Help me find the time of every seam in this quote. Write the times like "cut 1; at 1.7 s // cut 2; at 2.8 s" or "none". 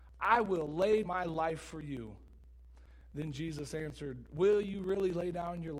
cut 1; at 1.0 s